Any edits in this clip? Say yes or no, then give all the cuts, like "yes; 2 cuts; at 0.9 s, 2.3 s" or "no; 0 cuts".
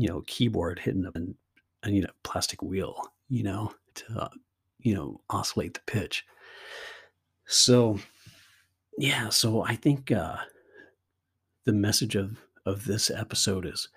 yes; 3 cuts; at 1.2 s, 2.1 s, 3.9 s